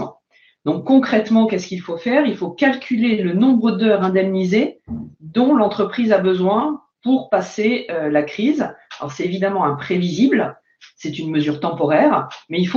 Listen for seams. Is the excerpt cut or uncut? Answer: uncut